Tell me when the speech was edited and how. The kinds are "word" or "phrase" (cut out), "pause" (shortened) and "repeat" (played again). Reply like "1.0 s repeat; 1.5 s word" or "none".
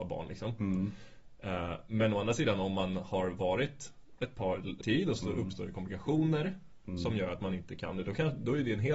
4.8 s word; 5.2 s word